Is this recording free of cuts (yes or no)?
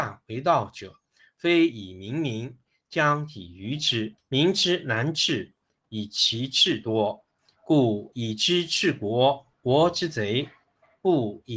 no